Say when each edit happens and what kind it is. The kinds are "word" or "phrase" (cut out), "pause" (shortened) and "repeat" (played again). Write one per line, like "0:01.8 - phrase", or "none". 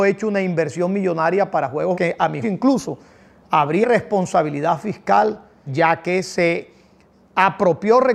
0:01.9 - word
0:02.4 - word
0:03.8 - word
0:05.7 - word